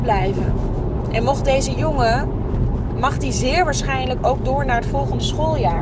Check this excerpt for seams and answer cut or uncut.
uncut